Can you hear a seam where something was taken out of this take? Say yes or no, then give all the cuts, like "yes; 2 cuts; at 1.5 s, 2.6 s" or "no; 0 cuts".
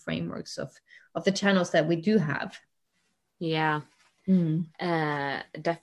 no; 0 cuts